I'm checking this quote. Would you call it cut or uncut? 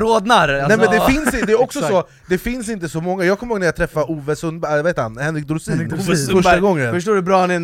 uncut